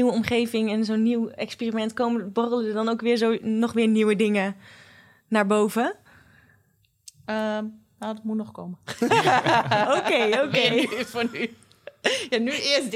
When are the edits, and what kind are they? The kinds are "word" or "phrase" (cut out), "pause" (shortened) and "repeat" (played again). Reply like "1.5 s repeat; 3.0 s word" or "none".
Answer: none